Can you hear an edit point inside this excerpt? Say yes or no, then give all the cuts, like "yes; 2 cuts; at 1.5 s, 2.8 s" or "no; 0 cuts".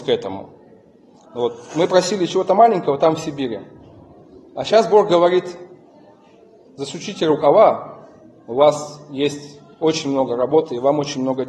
no; 0 cuts